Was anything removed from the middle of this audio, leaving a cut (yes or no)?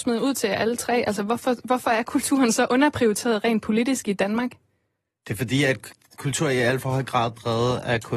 no